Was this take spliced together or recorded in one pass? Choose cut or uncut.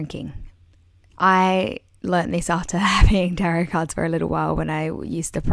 uncut